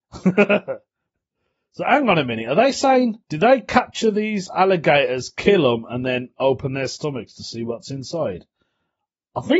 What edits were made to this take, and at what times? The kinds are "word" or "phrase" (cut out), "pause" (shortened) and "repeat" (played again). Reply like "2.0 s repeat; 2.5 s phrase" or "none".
3.2 s pause